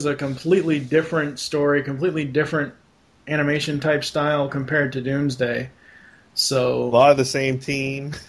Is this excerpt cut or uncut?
uncut